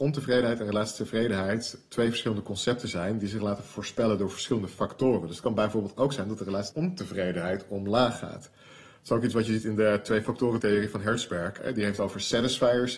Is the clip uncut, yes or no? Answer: yes